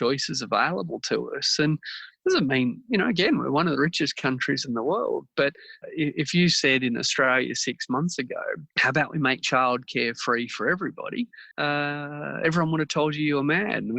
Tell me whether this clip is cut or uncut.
cut